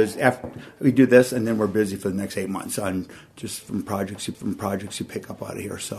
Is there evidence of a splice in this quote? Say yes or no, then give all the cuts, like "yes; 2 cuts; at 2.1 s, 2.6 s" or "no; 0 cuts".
yes; 1 cut; at 4.3 s